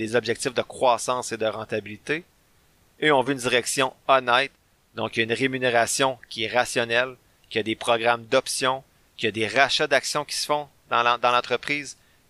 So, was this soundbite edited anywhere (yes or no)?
no